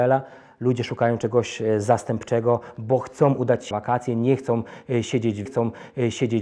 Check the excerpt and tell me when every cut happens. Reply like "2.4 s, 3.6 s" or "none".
3.7 s, 5.5 s